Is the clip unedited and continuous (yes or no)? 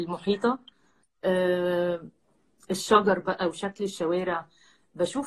yes